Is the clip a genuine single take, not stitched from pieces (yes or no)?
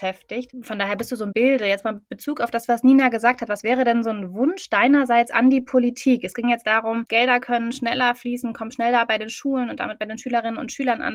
no